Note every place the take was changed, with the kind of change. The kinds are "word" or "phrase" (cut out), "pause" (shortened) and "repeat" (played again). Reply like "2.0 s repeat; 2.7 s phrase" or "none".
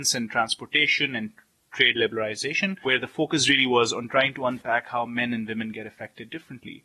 none